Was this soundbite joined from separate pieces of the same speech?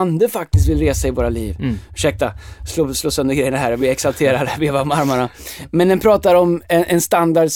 no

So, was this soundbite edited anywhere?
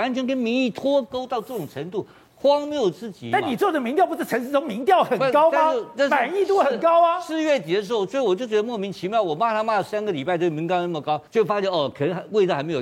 yes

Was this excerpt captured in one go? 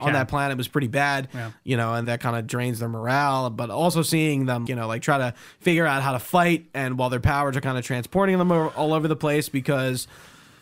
no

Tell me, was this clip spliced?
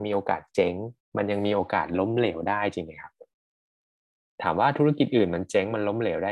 yes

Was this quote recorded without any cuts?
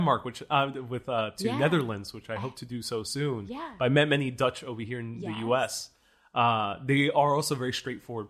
yes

